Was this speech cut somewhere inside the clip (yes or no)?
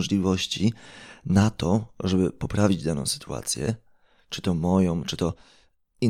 no